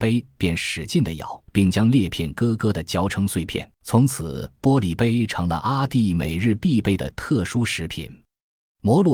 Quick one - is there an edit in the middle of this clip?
yes; 2 cuts; at 1.5 s, 3.8 s

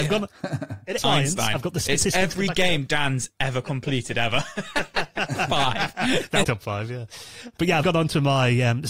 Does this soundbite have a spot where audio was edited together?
yes; 3 cuts; at 1.0 s, 6.4 s, 7.8 s

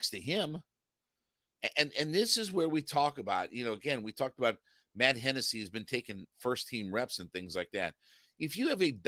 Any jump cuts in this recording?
no; 0 cuts

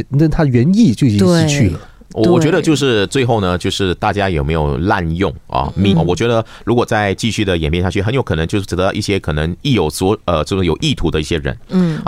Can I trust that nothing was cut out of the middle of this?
no; 1 cut; at 5.9 s

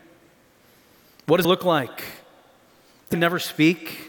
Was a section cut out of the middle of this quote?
yes; 2 cuts; at 1.4 s, 3.1 s

